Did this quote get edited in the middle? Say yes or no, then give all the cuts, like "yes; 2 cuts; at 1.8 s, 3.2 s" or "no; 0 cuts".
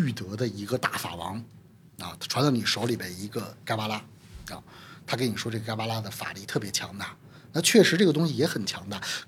no; 0 cuts